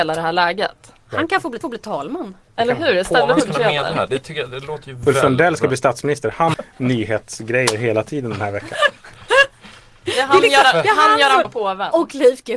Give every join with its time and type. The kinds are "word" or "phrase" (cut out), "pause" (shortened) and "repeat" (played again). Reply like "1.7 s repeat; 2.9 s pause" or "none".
1.6 s repeat; 3.5 s word; 6.5 s phrase; 11.4 s word